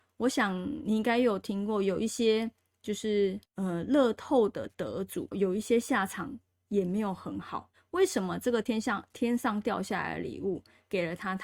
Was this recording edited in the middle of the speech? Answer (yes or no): yes